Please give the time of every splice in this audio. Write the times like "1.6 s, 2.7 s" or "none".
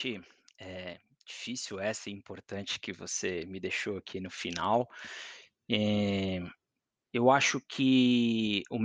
none